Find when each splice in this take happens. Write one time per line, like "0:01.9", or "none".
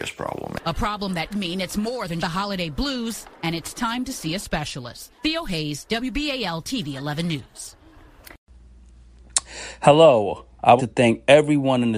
0:01.3
0:02.2
0:05.2
0:10.8